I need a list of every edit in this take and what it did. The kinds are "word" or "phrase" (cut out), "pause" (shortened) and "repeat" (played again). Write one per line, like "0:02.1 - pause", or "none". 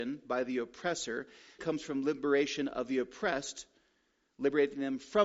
0:01.6 - word